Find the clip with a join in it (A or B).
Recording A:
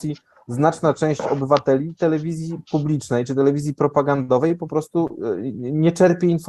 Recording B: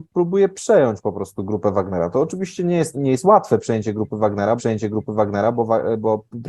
B